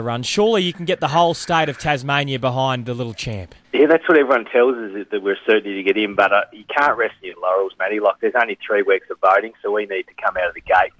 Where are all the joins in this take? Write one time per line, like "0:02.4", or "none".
0:03.6